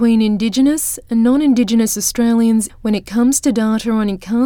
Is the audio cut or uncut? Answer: cut